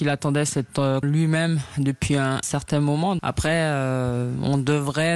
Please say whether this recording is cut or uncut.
cut